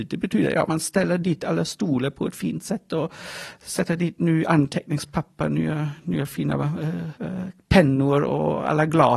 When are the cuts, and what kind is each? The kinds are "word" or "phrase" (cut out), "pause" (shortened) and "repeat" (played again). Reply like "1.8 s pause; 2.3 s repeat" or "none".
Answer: 7.2 s pause